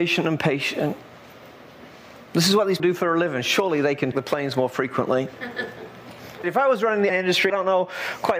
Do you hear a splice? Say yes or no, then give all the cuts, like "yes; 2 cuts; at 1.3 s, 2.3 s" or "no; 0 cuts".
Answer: yes; 5 cuts; at 2.8 s, 4.1 s, 6.4 s, 7.1 s, 7.5 s